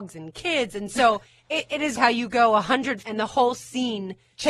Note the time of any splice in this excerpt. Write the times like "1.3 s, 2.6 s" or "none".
1.3 s, 2.0 s, 3.0 s